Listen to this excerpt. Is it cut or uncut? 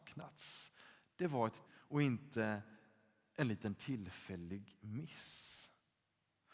cut